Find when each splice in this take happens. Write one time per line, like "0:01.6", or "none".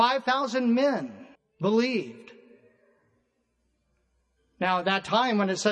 0:01.3